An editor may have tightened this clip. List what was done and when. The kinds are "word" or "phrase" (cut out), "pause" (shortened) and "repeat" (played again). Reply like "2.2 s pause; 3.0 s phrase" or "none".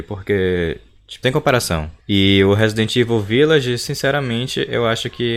1.2 s phrase; 2.0 s pause